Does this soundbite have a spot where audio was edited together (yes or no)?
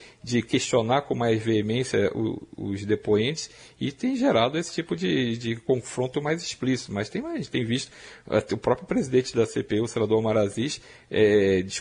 no